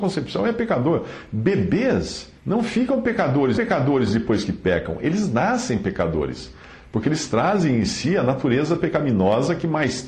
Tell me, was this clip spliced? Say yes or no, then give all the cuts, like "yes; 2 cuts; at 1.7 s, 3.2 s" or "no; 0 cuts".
yes; 2 cuts; at 2.4 s, 3.5 s